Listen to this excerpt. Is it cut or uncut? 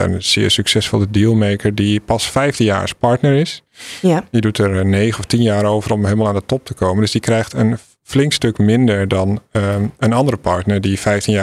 uncut